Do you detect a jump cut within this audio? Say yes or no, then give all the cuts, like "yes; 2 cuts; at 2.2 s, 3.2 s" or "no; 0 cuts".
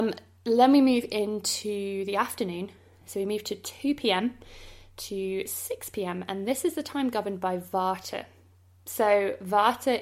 no; 0 cuts